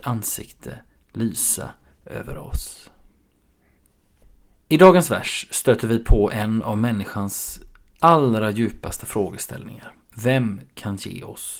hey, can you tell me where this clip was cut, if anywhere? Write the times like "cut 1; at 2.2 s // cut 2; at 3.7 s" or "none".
none